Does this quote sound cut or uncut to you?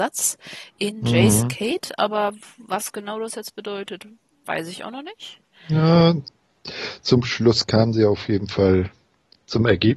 uncut